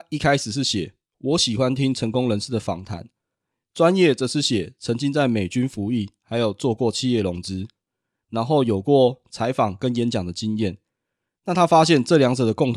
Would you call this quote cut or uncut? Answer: uncut